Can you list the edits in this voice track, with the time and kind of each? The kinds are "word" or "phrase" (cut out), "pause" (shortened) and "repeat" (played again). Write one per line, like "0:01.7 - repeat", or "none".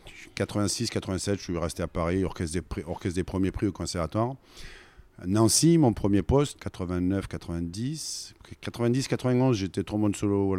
0:06.6 - word